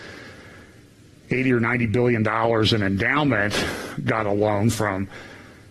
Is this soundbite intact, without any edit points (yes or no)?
yes